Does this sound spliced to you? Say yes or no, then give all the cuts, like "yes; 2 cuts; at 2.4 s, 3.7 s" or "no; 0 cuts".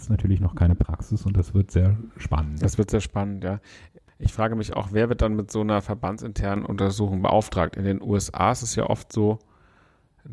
no; 0 cuts